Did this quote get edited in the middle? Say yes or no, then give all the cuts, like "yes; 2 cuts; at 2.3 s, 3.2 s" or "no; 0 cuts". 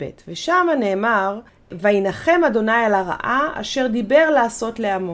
yes; 1 cut; at 1.5 s